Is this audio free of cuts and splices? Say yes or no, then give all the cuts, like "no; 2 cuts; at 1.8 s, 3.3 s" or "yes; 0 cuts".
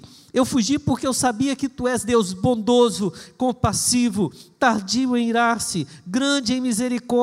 yes; 0 cuts